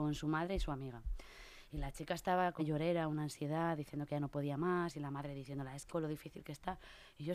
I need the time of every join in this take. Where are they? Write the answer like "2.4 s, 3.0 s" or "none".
2.6 s, 5.9 s